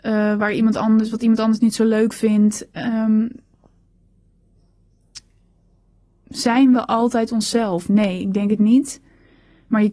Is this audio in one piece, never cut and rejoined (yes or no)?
yes